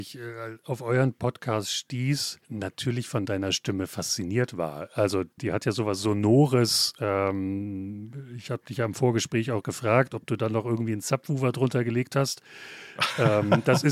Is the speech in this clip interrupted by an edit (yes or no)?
yes